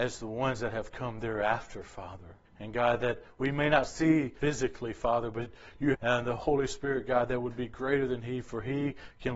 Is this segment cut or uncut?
cut